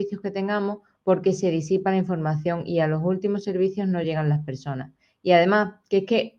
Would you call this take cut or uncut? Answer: uncut